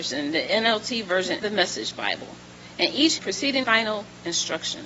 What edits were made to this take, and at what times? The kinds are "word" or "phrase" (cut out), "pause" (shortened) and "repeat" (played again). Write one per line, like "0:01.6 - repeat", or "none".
0:01.4 - word
0:03.2 - word
0:03.6 - phrase